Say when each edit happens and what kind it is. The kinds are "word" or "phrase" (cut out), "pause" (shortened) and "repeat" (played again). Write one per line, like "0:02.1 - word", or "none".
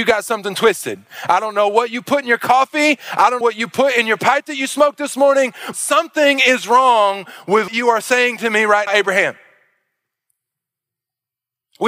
0:03.4 - word
0:05.7 - word
0:07.7 - word
0:08.9 - word